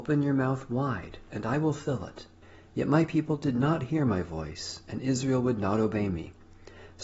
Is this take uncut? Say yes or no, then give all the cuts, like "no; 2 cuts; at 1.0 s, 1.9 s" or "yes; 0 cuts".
no; 1 cut; at 2.4 s